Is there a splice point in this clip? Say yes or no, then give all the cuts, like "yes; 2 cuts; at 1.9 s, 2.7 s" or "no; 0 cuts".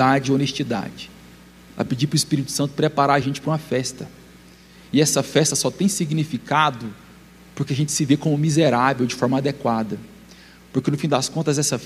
no; 0 cuts